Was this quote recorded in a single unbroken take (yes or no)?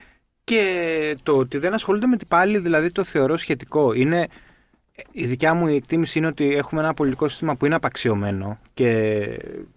no